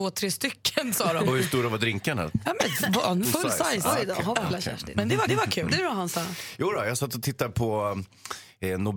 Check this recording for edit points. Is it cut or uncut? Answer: cut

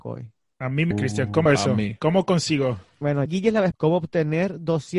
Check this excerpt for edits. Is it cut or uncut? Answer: cut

